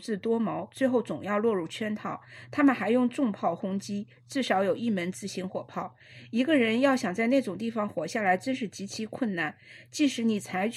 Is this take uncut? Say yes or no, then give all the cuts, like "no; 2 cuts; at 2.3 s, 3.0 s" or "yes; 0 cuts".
yes; 0 cuts